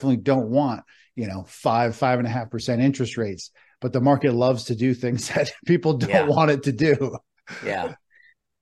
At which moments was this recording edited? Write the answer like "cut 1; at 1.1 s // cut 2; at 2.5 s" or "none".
none